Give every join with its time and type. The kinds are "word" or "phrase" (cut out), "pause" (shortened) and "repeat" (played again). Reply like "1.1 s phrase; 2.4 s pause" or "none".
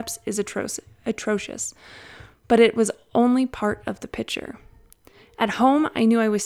none